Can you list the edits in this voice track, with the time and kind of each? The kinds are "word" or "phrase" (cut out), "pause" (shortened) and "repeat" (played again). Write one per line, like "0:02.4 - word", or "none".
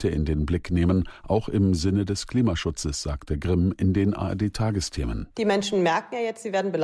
0:05.3 - pause

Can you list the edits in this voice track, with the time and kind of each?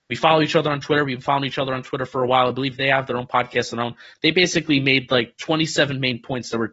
none

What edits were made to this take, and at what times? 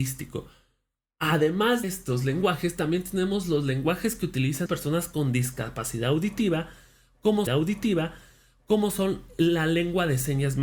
0:01.8 - word
0:04.7 - word
0:07.5 - repeat

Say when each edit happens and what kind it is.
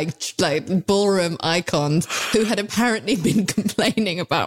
none

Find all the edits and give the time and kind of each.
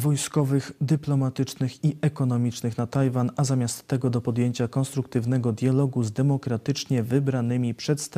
none

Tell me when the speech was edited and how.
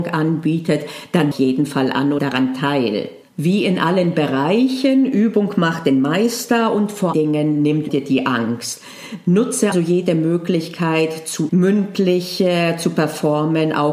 0:01.3 - phrase
0:02.2 - word
0:03.2 - pause
0:07.1 - word
0:07.9 - word
0:09.7 - word
0:11.5 - word

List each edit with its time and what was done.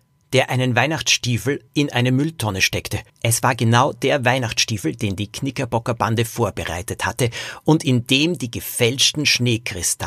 0:01.7 - pause
0:03.1 - pause

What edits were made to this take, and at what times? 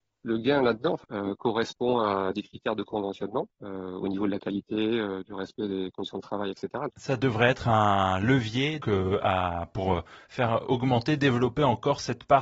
0:03.5 - pause
0:06.9 - pause
0:08.8 - word

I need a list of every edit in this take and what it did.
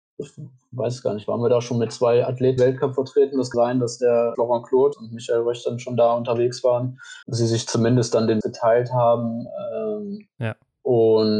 0:02.6 - word
0:03.5 - word
0:04.3 - word
0:04.9 - word
0:07.2 - pause
0:08.4 - word

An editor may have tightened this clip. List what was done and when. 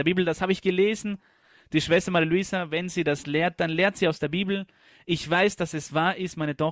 none

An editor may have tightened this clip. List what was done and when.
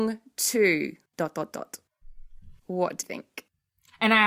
0:01.1 - pause
0:02.6 - pause
0:03.0 - word

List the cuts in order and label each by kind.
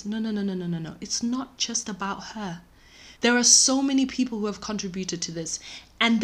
0:03.2 - pause

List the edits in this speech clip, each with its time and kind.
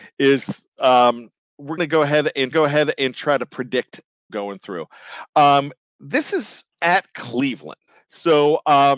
0:01.8 - word
0:02.5 - repeat
0:04.3 - phrase
0:06.7 - pause
0:07.9 - pause

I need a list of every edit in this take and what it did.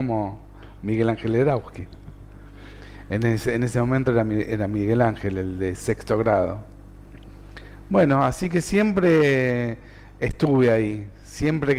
none

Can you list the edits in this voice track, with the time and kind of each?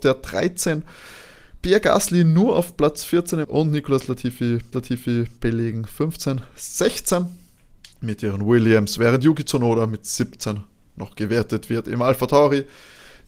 0:03.4 - phrase
0:04.7 - repeat
0:07.9 - pause

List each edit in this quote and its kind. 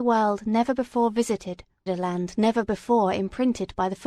0:01.9 - phrase

